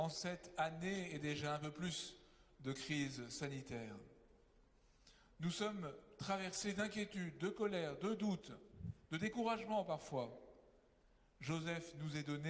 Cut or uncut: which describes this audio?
uncut